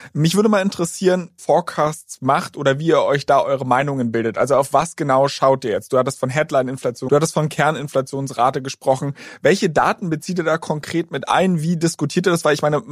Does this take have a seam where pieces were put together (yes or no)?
yes